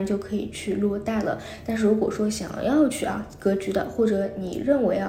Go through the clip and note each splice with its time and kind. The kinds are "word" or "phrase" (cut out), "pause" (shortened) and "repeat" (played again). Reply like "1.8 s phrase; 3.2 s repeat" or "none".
none